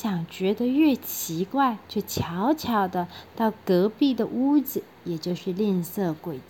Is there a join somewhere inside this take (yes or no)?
yes